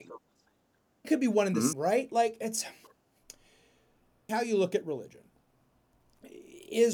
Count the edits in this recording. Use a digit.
3